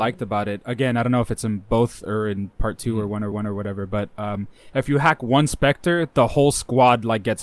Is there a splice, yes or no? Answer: yes